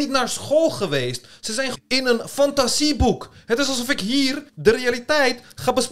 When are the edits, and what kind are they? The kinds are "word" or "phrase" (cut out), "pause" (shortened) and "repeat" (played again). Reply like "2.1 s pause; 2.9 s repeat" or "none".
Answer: 1.7 s word; 4.5 s pause